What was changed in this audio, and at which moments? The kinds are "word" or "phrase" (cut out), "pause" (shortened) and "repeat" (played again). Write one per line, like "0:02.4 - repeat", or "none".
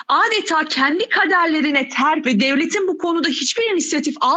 0:02.2 - word